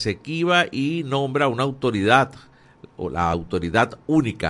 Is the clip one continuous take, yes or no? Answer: yes